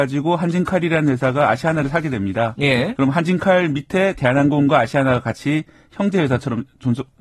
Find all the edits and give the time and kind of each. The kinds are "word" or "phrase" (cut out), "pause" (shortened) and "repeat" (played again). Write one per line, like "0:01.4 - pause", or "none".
none